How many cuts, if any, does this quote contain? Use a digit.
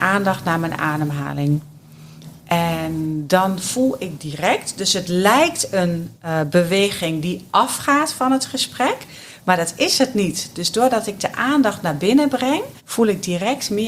1